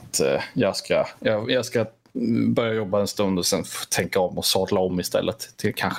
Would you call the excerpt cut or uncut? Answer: uncut